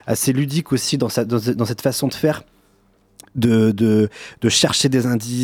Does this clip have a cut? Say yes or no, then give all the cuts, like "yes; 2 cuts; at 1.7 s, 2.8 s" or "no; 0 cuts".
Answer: no; 0 cuts